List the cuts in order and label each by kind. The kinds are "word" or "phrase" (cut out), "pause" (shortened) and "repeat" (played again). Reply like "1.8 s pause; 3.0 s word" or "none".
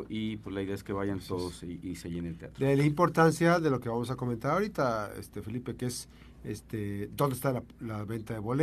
none